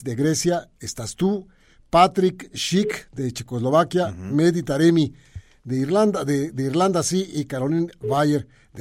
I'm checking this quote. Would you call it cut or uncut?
uncut